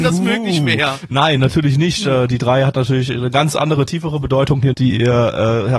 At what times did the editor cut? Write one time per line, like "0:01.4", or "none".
0:04.7